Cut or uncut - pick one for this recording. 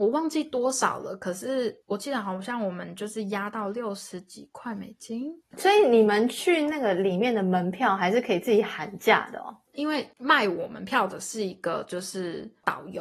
cut